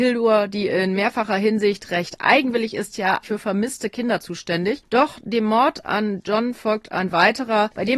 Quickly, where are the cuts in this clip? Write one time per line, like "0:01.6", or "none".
0:03.2